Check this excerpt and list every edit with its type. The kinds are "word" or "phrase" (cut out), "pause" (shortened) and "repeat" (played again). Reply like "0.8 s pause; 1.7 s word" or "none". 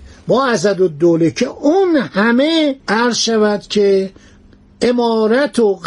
2.8 s pause